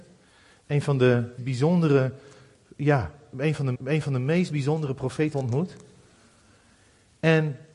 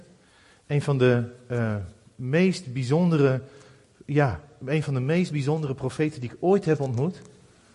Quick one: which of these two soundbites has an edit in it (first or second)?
first